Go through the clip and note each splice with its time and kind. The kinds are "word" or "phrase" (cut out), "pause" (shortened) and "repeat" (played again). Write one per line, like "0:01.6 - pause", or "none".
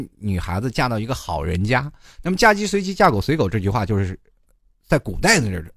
none